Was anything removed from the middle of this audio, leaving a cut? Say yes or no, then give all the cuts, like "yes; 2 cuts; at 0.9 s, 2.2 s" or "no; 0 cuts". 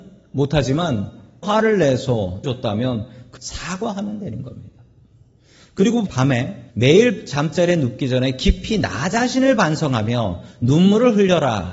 yes; 5 cuts; at 1.4 s, 2.4 s, 3.4 s, 6.1 s, 6.7 s